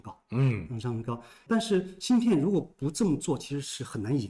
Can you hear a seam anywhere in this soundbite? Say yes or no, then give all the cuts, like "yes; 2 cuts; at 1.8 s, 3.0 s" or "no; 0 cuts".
no; 0 cuts